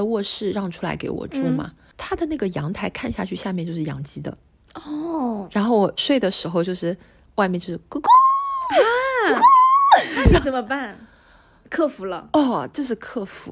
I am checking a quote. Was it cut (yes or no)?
no